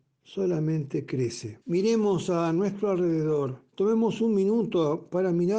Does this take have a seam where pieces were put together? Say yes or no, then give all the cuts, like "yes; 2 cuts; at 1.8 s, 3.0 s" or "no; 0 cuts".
yes; 2 cuts; at 1.6 s, 3.7 s